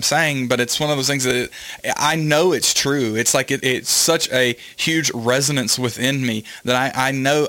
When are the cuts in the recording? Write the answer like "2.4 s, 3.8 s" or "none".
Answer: 3.6 s